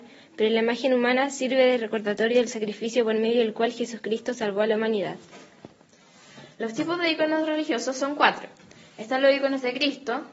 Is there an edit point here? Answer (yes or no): no